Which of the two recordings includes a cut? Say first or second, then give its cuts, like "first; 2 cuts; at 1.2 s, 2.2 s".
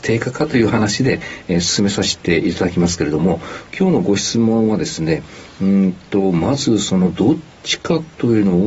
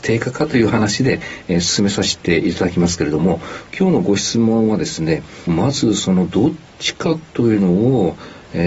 second; 1 cut; at 5.5 s